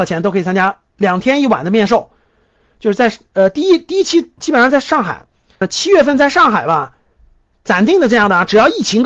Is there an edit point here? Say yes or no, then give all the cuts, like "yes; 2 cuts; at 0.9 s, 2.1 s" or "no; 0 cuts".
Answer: yes; 1 cut; at 5.6 s